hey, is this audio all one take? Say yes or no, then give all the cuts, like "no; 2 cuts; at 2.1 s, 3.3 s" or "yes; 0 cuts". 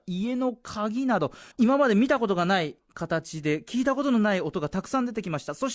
no; 1 cut; at 1.5 s